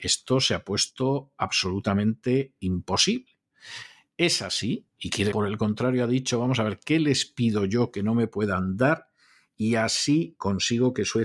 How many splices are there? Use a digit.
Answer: 1